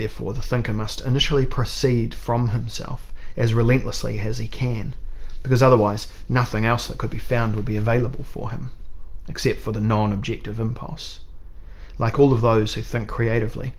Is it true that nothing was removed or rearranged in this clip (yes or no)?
yes